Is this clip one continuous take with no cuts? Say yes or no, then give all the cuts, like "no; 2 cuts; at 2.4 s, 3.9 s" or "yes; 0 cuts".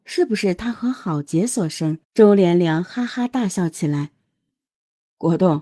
no; 1 cut; at 2.0 s